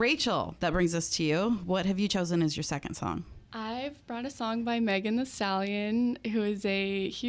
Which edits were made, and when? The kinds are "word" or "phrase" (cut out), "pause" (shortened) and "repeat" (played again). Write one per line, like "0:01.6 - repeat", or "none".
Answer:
0:03.5 - pause